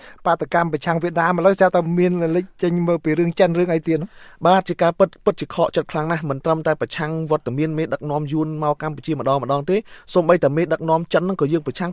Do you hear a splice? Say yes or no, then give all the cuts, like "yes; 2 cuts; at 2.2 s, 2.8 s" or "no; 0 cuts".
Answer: no; 0 cuts